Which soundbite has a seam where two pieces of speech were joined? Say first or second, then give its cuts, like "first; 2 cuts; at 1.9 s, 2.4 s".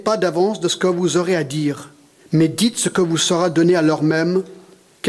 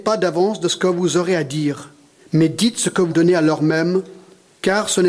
second; 1 cut; at 3.1 s